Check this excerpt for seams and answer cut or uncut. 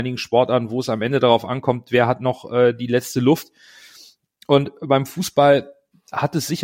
uncut